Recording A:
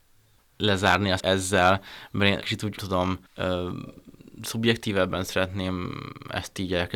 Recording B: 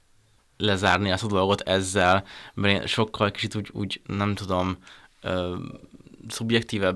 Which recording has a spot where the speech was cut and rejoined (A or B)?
A